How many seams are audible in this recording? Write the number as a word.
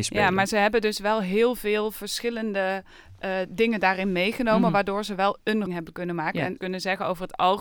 two